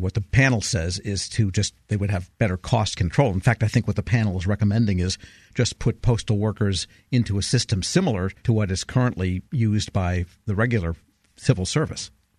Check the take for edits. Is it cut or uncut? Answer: cut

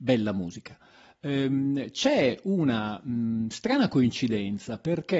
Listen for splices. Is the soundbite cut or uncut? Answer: uncut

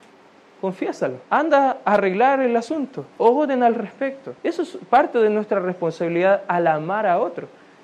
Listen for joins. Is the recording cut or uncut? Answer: cut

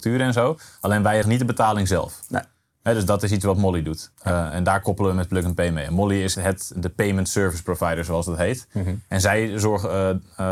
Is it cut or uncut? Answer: cut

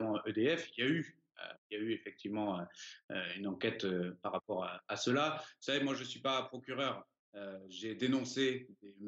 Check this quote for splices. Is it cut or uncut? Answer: cut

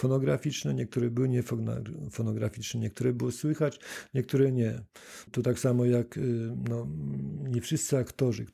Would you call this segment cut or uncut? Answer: uncut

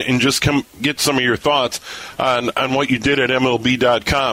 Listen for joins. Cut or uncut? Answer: uncut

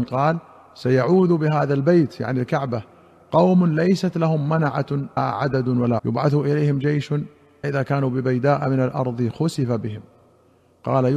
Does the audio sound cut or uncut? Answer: cut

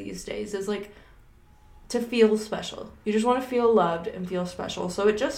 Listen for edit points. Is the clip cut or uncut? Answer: uncut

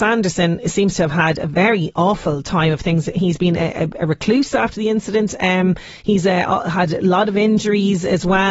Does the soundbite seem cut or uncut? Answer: uncut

